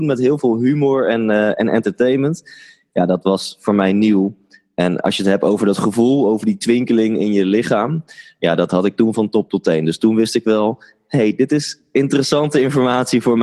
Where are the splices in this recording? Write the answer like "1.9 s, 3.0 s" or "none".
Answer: 5.0 s